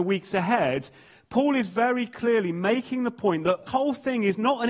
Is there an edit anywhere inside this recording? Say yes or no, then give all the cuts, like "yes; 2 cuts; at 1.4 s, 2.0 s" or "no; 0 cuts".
yes; 1 cut; at 3.7 s